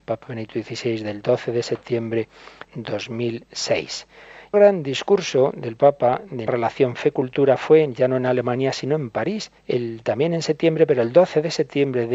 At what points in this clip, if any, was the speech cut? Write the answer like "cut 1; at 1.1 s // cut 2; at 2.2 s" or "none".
cut 1; at 2.7 s // cut 2; at 4.5 s // cut 3; at 6.5 s // cut 4; at 9.6 s

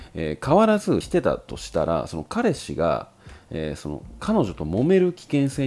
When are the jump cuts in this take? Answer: cut 1; at 1.0 s

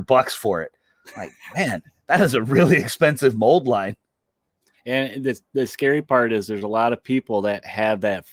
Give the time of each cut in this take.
none

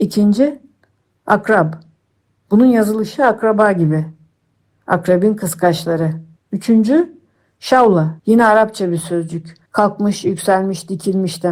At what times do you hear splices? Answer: cut 1; at 6.4 s // cut 2; at 8.2 s // cut 3; at 9.7 s

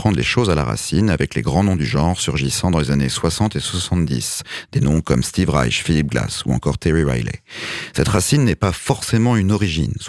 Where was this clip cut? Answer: none

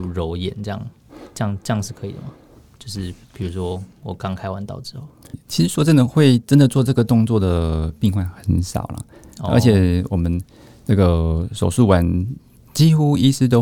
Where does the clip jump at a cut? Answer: cut 1; at 5.3 s

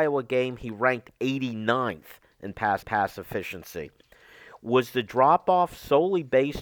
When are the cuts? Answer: cut 1; at 2.8 s

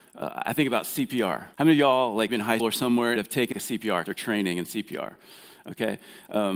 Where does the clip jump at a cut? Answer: cut 1; at 1.5 s // cut 2; at 2.3 s // cut 3; at 2.6 s // cut 4; at 3.2 s // cut 5; at 3.5 s // cut 6; at 4.1 s

